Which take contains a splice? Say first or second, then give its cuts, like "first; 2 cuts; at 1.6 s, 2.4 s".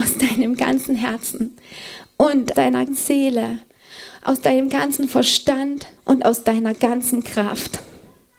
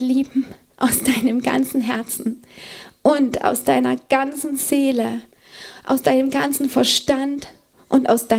first; 3 cuts; at 2.5 s, 2.9 s, 6.0 s